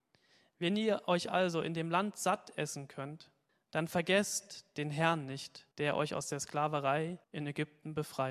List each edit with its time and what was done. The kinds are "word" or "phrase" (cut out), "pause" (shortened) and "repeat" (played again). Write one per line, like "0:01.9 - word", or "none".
0:03.5 - pause
0:05.7 - pause
0:07.2 - pause